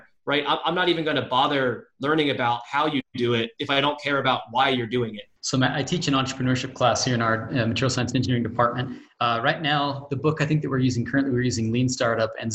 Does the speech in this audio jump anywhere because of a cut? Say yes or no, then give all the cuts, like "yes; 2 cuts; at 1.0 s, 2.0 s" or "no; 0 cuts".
yes; 1 cut; at 5.4 s